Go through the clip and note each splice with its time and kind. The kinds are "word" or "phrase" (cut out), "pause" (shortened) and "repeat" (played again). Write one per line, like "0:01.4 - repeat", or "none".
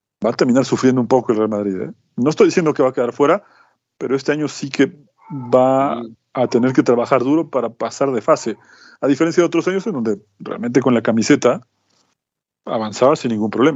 none